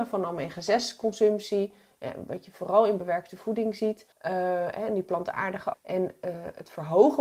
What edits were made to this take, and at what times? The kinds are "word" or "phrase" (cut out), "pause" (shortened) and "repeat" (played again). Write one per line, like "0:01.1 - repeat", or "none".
0:04.1 - pause
0:05.7 - word